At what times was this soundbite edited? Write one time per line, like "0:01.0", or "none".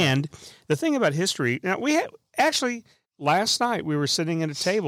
0:03.0